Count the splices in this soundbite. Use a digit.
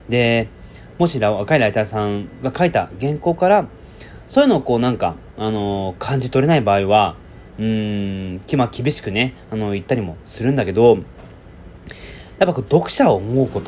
1